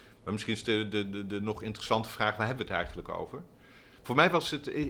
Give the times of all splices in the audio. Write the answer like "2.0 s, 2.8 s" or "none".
none